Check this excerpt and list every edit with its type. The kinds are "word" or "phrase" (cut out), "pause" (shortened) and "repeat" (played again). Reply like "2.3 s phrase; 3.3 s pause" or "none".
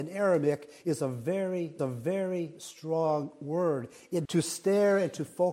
1.8 s repeat; 4.2 s word